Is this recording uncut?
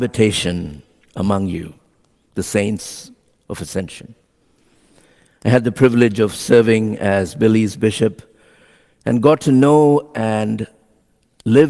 yes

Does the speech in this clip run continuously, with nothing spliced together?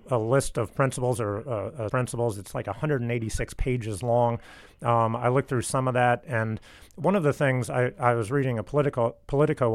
no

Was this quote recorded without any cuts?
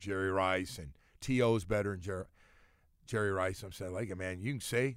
yes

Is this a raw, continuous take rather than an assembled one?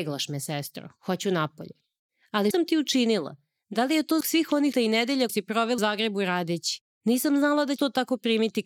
no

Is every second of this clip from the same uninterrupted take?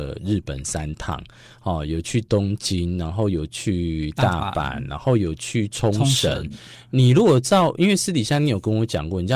yes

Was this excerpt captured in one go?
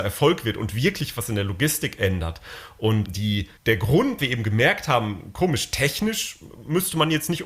no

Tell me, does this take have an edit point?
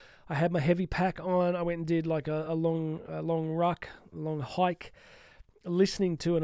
no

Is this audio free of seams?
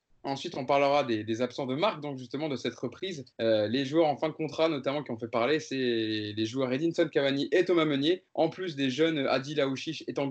no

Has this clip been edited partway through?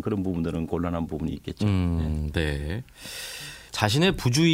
no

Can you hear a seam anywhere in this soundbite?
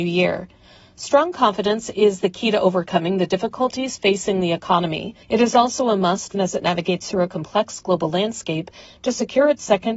yes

